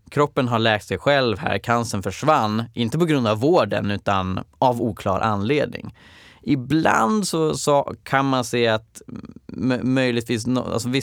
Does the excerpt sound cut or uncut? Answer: uncut